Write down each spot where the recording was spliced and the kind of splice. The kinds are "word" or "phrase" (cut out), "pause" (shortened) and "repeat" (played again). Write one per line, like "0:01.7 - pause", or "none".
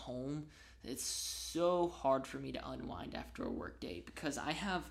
none

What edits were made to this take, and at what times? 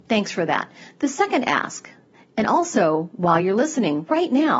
none

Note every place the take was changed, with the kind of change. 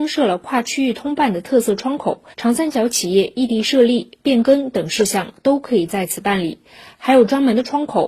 0:02.3 - pause

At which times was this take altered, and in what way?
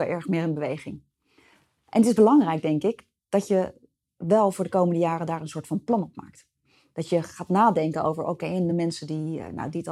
none

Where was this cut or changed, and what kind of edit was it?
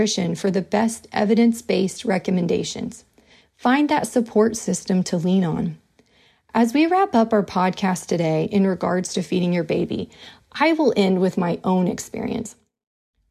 none

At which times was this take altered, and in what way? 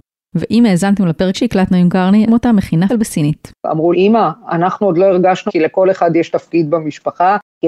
0:01.3 - word
0:02.3 - phrase
0:02.9 - word
0:03.9 - word
0:05.5 - word

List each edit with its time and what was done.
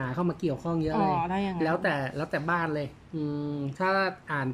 0:03.0 - pause

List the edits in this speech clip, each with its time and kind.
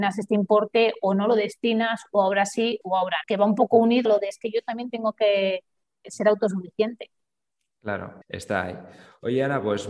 0:02.8 - word
0:03.2 - word
0:04.1 - word
0:06.0 - word
0:08.2 - pause

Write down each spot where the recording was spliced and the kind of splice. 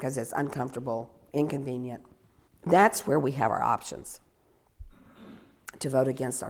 0:02.5 - pause

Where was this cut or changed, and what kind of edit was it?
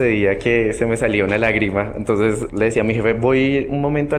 0:02.5 - word

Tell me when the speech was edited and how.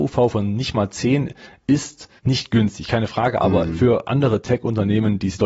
0:02.2 - pause

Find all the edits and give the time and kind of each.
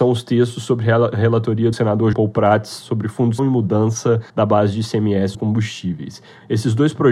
0:01.7 - word
0:02.1 - word
0:03.4 - word
0:04.3 - pause
0:05.3 - word

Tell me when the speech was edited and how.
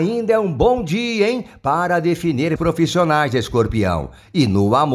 0:02.6 - word

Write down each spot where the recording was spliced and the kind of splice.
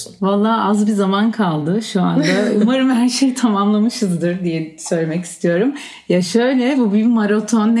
none

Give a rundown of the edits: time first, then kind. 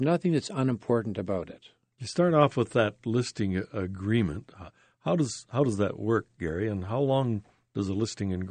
none

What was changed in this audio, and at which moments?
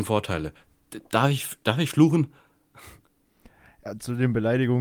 none

